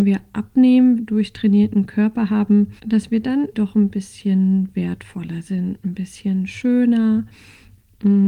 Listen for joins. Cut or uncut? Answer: cut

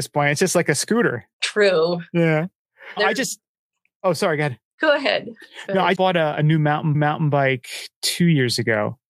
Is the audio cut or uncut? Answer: cut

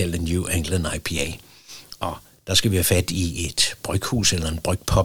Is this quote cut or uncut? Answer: uncut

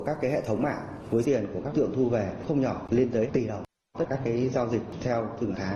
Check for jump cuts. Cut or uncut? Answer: cut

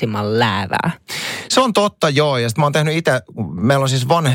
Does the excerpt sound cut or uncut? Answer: uncut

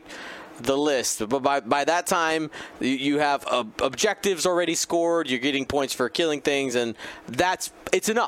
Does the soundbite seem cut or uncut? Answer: uncut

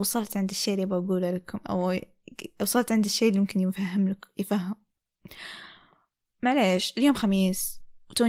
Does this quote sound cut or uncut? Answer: uncut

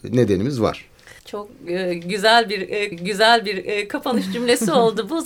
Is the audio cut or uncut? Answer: cut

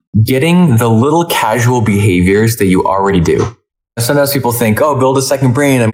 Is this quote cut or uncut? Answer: uncut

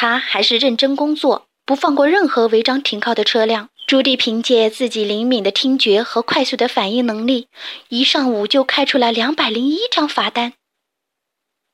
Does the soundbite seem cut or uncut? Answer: cut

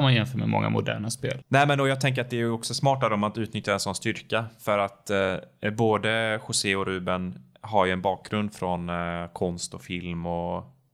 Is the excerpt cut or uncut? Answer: uncut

